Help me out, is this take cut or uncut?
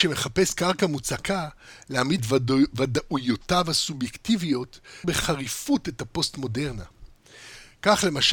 cut